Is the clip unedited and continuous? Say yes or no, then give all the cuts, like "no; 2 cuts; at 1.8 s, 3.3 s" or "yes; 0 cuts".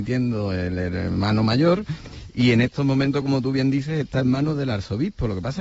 yes; 0 cuts